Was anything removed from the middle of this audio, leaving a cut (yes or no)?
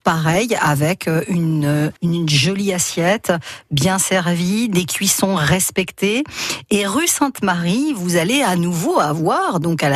yes